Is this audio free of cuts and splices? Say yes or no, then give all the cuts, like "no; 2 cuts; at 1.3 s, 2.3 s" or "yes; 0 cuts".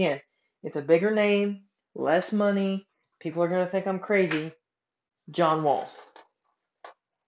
yes; 0 cuts